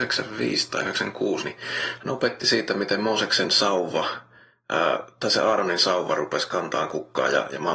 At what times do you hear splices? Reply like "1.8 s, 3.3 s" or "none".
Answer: none

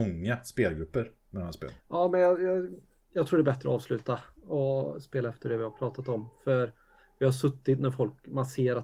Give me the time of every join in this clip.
1.8 s

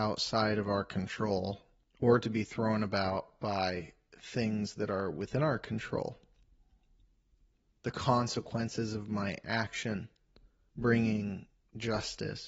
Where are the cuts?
none

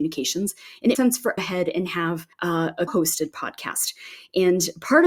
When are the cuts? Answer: 0.9 s, 1.4 s, 2.3 s, 2.9 s

